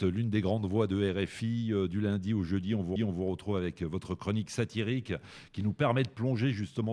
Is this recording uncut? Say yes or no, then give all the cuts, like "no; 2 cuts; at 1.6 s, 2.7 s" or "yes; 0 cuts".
no; 1 cut; at 3.0 s